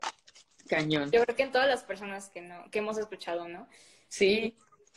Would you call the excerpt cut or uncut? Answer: uncut